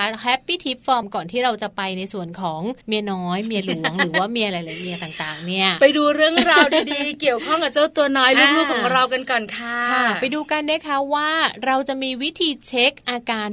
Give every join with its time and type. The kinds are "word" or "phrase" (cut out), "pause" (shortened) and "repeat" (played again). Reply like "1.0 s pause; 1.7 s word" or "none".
1.0 s phrase; 2.8 s pause